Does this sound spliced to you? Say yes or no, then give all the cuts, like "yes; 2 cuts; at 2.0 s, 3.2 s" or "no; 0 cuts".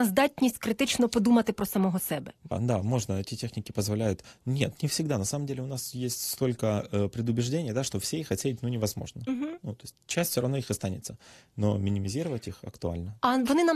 yes; 1 cut; at 2.5 s